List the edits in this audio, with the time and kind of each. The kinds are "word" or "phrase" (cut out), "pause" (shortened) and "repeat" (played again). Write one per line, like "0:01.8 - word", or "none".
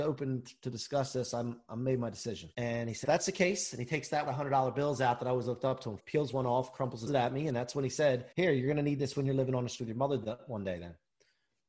0:01.7 - word
0:02.5 - pause
0:03.0 - word
0:04.3 - word
0:06.0 - word
0:07.1 - phrase
0:08.3 - pause
0:09.8 - word